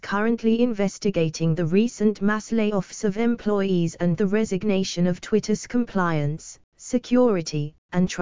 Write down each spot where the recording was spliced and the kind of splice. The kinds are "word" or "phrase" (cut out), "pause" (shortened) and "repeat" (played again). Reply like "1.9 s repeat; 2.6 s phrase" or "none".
none

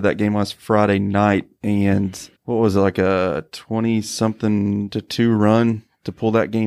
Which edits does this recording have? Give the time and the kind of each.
2.3 s pause

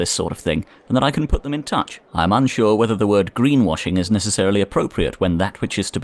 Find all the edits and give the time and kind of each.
2.0 s pause

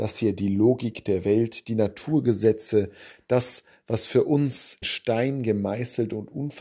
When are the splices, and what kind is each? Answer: 4.8 s word

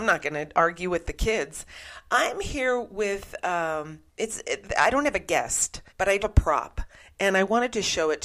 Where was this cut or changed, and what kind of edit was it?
4.1 s pause; 5.9 s pause; 6.2 s word

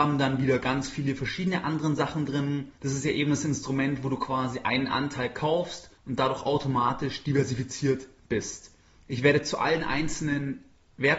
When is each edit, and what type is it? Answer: 2.8 s pause; 5.9 s pause; 8.8 s pause

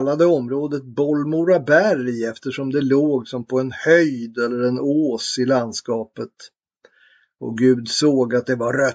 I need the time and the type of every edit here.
none

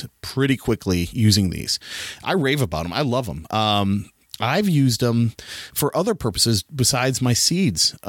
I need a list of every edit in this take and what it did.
none

